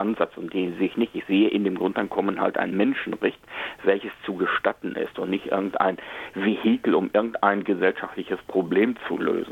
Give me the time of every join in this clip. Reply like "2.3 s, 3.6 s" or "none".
none